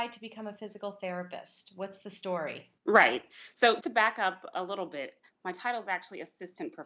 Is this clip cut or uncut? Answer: cut